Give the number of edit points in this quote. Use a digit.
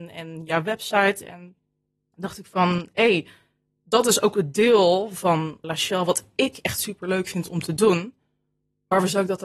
1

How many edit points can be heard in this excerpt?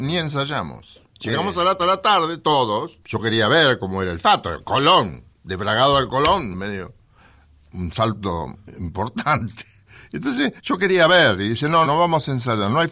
7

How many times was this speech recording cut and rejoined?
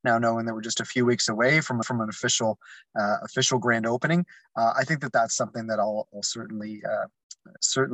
1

